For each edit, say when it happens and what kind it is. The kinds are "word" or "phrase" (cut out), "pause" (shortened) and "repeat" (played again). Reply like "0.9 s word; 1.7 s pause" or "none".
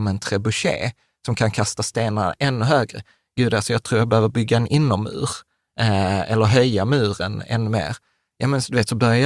none